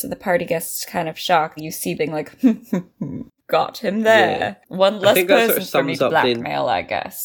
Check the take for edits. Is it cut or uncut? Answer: cut